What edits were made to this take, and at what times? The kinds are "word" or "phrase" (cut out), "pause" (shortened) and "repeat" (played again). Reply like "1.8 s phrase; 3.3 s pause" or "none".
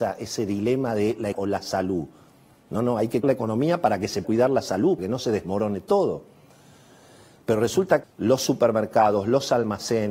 1.3 s word; 3.2 s word; 4.2 s word; 5.0 s word; 8.0 s word